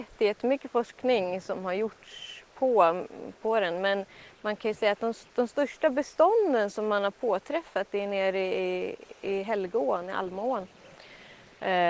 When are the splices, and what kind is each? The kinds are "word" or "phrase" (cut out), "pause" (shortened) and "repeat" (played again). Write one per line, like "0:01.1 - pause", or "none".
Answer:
0:05.3 - pause